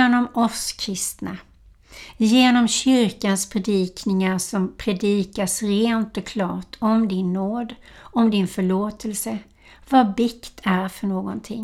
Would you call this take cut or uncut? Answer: uncut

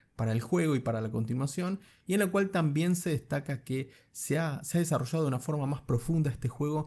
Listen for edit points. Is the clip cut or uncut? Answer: uncut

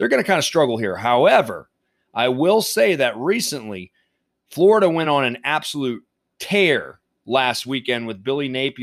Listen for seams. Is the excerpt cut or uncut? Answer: uncut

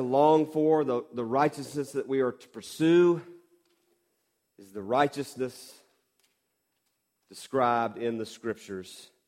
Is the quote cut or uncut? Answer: uncut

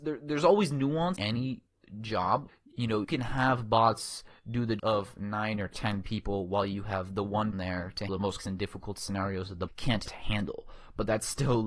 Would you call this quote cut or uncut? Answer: cut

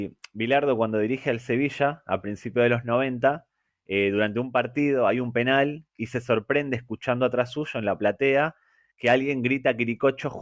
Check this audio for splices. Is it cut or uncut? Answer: uncut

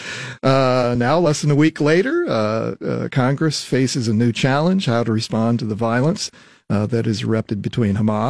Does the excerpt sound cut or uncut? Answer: uncut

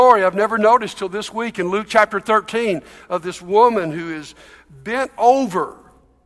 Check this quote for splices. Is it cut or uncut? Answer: uncut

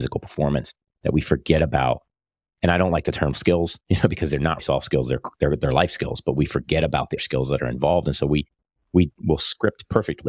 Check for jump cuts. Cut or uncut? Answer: cut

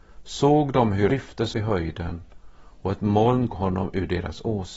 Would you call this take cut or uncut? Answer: cut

